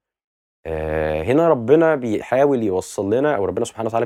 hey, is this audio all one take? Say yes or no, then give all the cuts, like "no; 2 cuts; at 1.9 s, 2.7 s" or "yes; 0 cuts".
yes; 0 cuts